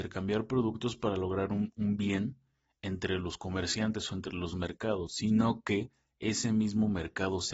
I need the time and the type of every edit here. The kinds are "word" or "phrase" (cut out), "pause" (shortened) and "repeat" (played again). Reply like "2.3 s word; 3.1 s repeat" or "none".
none